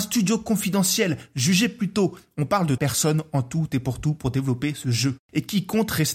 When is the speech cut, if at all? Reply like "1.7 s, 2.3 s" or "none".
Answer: 2.8 s